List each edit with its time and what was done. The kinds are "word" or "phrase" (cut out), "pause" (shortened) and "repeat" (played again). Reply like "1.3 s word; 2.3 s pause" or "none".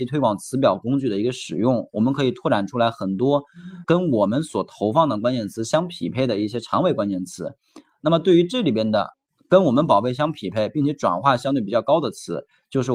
3.8 s word

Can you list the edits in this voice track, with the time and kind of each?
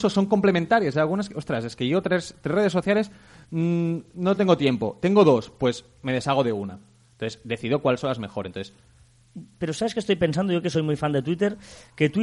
none

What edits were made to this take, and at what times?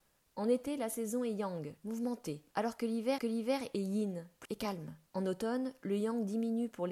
1.8 s word; 2.5 s pause; 3.2 s repeat; 4.5 s word; 5.1 s pause

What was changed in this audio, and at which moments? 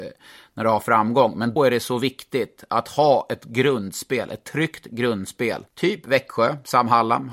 1.6 s word; 5.7 s pause

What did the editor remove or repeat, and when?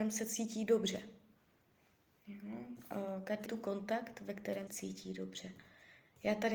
3.5 s phrase; 4.7 s word

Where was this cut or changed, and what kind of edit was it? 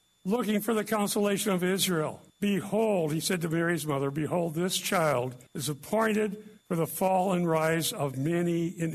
2.3 s pause; 5.5 s pause; 6.6 s pause

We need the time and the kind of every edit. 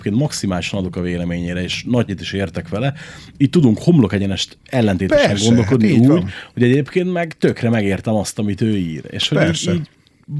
2.1 s word

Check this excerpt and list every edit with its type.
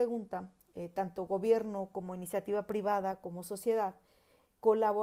none

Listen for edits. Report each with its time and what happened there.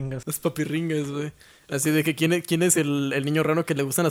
none

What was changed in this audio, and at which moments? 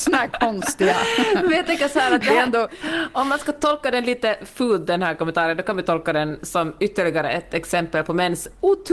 none

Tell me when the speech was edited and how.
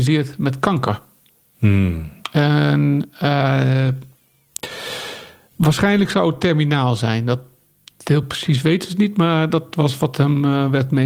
none

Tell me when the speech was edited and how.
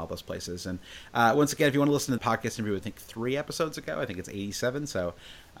2.2 s word; 2.8 s phrase

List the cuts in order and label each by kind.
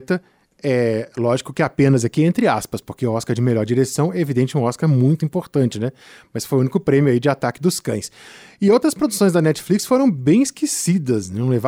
none

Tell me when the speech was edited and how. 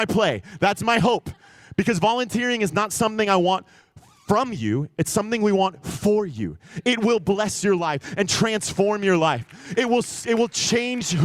none

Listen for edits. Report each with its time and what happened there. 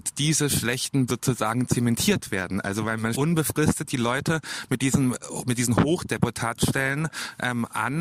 1.1 s word; 3.1 s word

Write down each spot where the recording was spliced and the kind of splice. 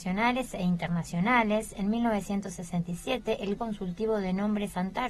3.6 s word

